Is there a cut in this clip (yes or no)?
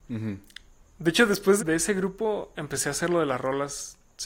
yes